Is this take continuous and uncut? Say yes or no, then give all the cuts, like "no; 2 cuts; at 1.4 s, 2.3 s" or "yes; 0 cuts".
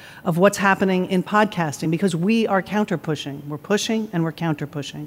yes; 0 cuts